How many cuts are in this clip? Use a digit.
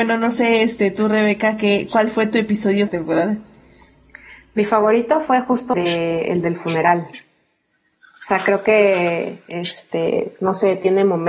2